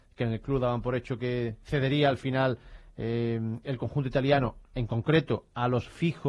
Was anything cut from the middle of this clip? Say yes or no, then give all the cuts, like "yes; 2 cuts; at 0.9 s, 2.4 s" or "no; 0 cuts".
no; 0 cuts